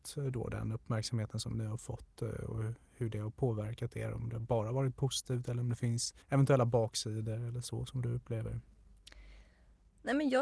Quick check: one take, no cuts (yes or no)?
no